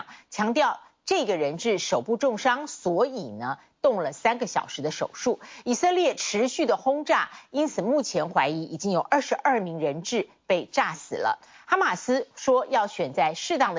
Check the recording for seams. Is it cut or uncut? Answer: uncut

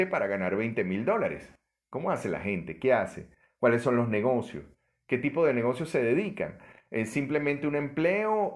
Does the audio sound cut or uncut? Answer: uncut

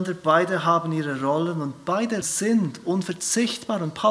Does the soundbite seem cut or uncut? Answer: cut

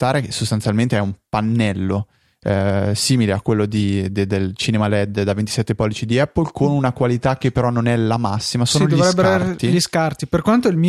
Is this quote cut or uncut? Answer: uncut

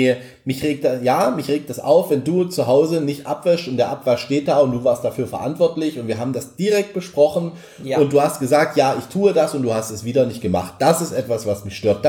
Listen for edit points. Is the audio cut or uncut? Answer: uncut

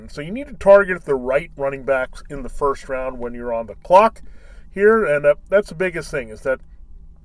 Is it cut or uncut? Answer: uncut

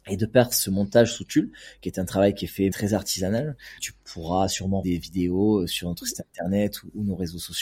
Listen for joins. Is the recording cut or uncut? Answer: cut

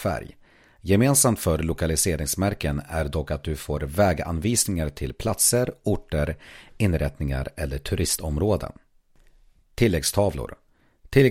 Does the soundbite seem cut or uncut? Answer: uncut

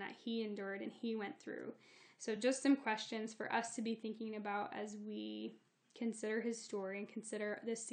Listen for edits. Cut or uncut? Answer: uncut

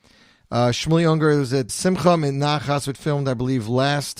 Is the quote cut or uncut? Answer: cut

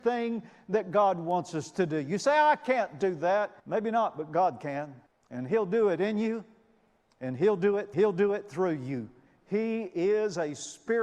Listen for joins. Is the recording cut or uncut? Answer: cut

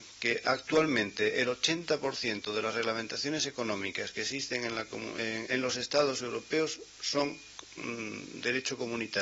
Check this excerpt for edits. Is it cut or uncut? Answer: cut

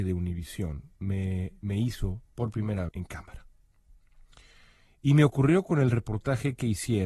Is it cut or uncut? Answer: cut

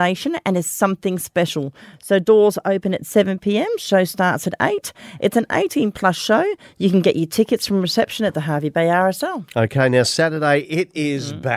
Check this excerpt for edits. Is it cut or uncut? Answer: uncut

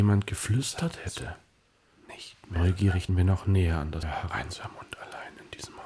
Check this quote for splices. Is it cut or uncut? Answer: cut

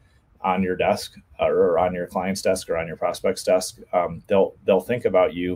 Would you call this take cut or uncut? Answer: uncut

